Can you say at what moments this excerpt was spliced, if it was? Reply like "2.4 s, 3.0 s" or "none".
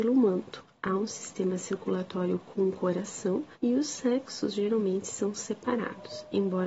3.5 s

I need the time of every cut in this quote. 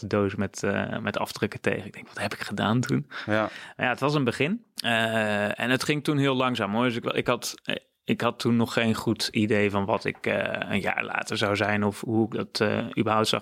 4.7 s, 7.0 s

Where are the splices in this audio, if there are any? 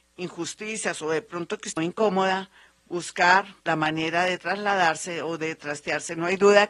1.8 s, 3.6 s

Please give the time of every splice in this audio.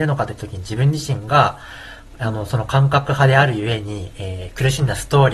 none

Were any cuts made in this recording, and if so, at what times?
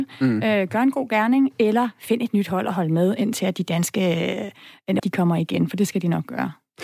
5.0 s

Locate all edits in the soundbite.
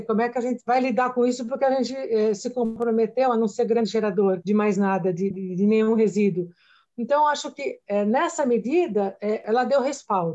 5.3 s

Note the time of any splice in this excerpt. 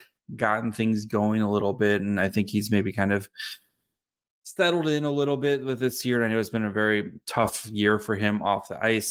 none

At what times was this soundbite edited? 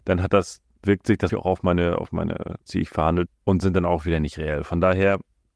1.3 s, 2.7 s, 3.3 s

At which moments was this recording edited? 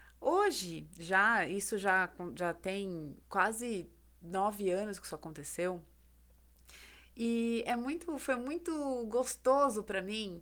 3.2 s

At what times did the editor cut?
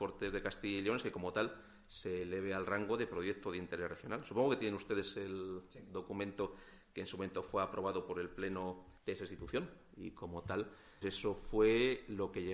9.0 s, 11.0 s

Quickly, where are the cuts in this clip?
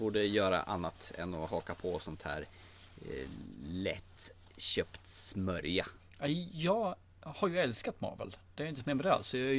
none

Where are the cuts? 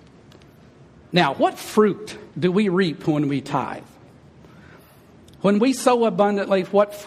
2.3 s

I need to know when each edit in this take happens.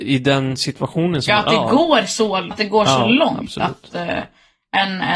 2.5 s

